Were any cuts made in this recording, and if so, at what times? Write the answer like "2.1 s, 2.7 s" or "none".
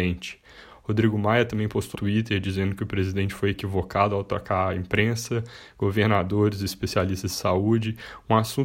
1.9 s